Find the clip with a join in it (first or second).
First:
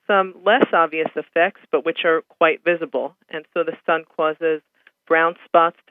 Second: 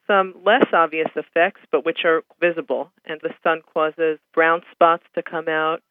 second